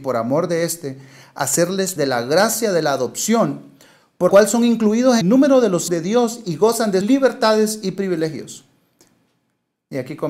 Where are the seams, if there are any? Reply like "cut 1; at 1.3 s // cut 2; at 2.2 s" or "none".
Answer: cut 1; at 2.0 s // cut 2; at 4.3 s // cut 3; at 5.2 s // cut 4; at 5.9 s // cut 5; at 7.0 s

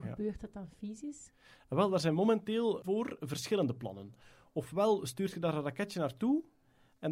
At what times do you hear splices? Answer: cut 1; at 2.8 s

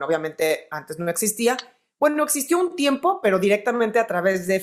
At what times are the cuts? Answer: none

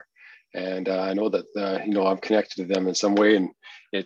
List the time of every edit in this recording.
none

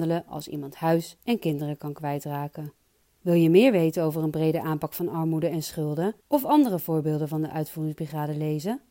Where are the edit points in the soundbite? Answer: cut 1; at 3.0 s // cut 2; at 6.2 s

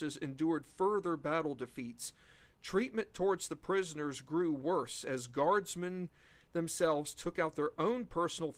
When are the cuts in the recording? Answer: none

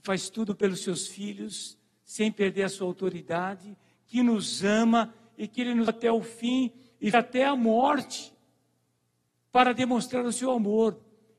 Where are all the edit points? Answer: cut 1; at 5.9 s // cut 2; at 7.1 s

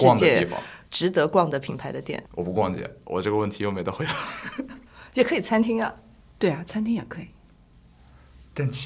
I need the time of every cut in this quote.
cut 1; at 2.3 s

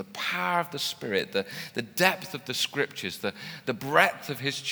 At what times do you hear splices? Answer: none

